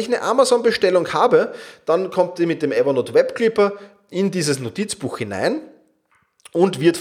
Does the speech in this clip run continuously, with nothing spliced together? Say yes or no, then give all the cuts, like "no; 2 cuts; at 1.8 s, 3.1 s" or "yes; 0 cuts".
yes; 0 cuts